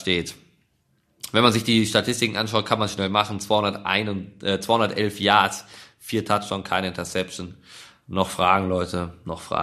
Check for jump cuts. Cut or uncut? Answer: uncut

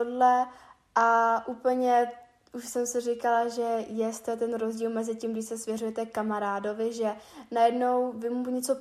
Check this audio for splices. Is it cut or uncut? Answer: uncut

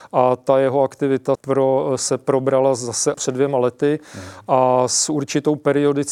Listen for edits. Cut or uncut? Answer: cut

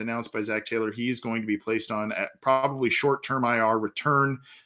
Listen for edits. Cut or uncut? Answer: uncut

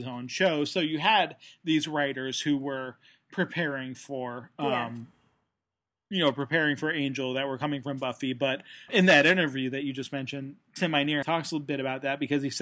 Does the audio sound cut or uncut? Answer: cut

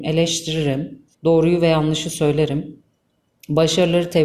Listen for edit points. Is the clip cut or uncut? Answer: cut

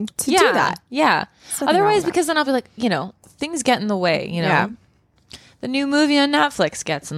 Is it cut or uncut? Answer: uncut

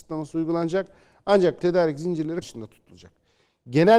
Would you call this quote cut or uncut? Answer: cut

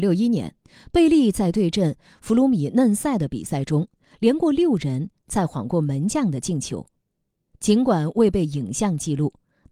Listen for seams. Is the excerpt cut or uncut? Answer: uncut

